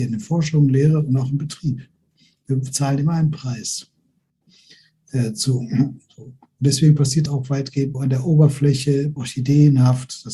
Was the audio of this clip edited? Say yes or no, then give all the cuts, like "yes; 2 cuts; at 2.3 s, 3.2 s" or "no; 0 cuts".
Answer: yes; 3 cuts; at 7.3 s, 7.9 s, 9.2 s